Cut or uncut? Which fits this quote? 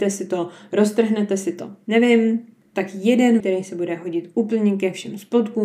cut